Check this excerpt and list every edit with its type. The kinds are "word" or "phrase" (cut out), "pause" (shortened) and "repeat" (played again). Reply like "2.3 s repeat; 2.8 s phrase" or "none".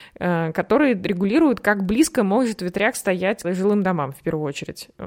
3.4 s word